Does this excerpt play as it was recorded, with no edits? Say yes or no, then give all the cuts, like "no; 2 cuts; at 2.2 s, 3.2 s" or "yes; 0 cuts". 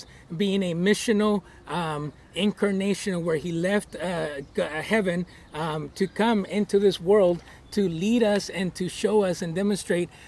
yes; 0 cuts